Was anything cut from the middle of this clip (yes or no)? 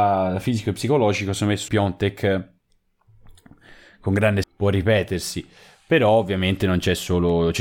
yes